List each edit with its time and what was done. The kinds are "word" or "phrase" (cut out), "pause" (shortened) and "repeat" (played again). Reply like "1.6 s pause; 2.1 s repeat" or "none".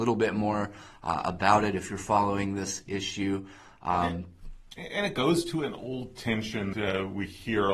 6.7 s word